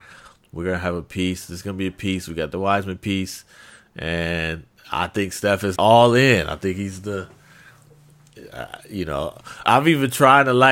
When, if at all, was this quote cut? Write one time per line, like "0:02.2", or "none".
0:05.8
0:09.6